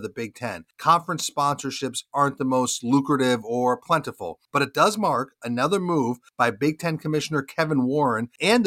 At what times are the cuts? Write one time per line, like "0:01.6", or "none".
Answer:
none